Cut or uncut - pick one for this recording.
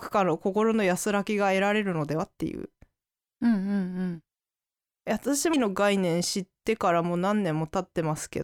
cut